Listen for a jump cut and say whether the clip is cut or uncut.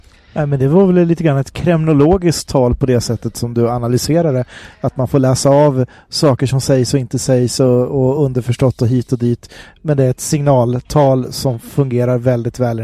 uncut